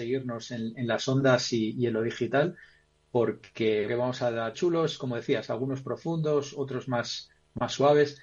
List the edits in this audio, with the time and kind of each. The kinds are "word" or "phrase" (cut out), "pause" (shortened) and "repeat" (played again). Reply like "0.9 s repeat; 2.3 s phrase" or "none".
3.9 s phrase; 4.5 s phrase